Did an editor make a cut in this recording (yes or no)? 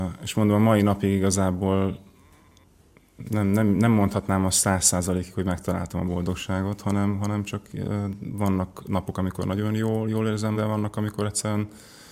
yes